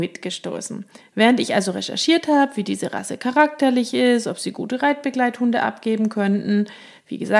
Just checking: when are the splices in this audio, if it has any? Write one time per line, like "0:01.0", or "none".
0:01.0